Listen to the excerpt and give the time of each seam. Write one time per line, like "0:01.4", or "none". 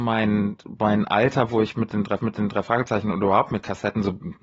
0:02.2